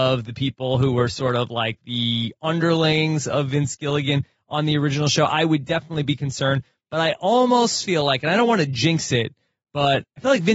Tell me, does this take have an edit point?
no; 0 cuts

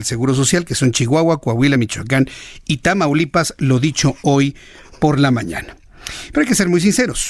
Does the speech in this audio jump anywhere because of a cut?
no; 0 cuts

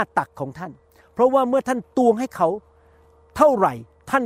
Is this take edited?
no; 0 cuts

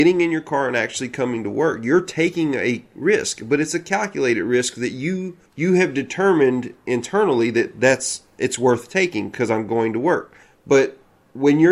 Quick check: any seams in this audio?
yes; 2 cuts; at 5.5 s, 10.4 s

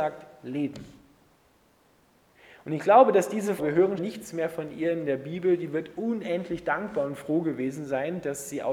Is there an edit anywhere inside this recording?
yes; 2 cuts; at 3.6 s, 4.0 s

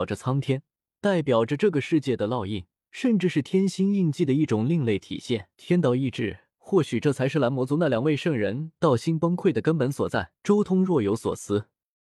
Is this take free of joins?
no; 4 cuts; at 2.8 s, 5.5 s, 6.5 s, 10.4 s

